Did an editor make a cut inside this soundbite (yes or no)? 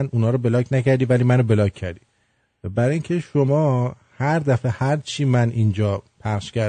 no